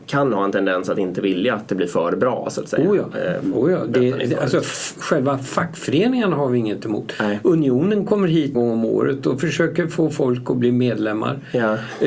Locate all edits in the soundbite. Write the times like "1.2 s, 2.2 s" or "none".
8.5 s